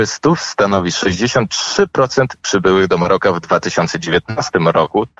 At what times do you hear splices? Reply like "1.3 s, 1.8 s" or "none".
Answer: 2.4 s